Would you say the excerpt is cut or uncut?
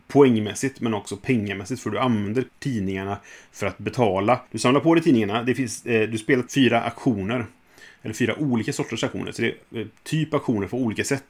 cut